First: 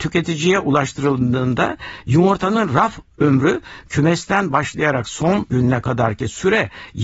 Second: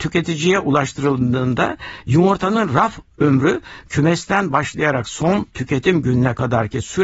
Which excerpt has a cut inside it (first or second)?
first